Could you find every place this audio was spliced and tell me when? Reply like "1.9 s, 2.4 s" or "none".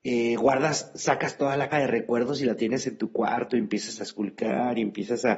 1.7 s